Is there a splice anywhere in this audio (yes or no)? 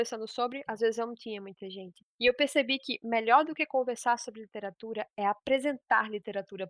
no